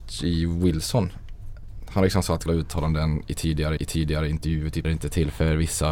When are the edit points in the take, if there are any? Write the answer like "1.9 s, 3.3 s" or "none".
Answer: 2.5 s, 3.8 s, 4.8 s